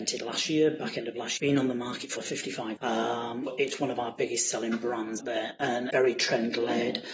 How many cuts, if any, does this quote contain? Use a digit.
6